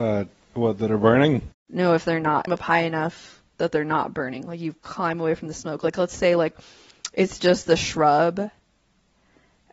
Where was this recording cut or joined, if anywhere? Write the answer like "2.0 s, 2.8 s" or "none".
1.6 s, 2.5 s, 3.5 s, 4.8 s

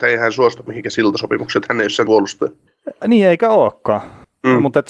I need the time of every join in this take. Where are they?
2.1 s

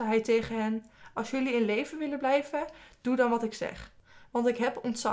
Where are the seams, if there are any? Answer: none

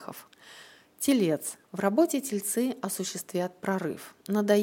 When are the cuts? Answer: 1.6 s

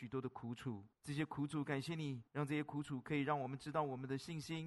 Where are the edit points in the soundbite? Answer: 0.9 s, 2.3 s

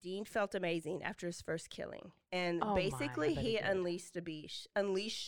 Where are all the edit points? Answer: none

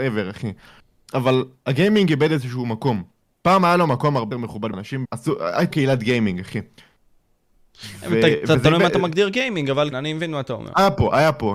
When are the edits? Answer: 4.3 s, 4.7 s, 5.0 s, 5.7 s, 9.9 s

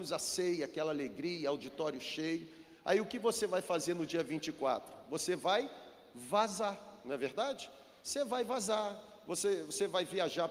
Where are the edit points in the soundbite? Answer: none

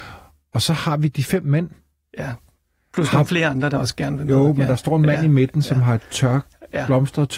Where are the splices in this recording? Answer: none

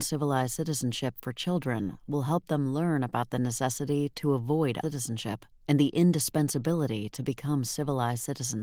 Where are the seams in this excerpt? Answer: 4.8 s

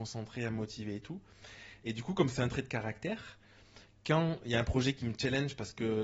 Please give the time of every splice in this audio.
none

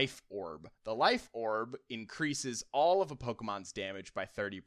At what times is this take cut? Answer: none

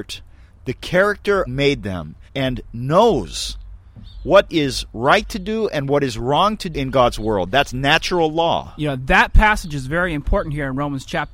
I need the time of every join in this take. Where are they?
1.5 s, 2.3 s, 4.2 s, 6.7 s

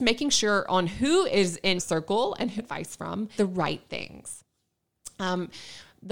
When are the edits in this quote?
1.8 s, 2.6 s, 3.3 s

